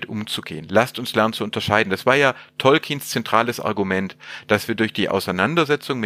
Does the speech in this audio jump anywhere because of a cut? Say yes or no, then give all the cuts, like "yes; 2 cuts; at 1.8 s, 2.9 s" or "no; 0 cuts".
no; 0 cuts